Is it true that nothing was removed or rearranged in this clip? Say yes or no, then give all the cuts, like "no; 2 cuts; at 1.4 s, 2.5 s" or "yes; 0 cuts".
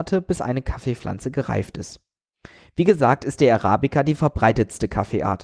yes; 0 cuts